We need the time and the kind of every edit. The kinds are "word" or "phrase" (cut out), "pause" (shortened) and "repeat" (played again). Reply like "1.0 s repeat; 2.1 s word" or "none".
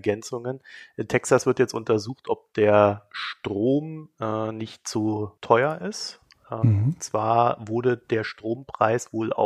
5.4 s pause